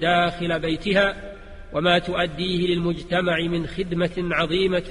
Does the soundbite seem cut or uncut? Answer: uncut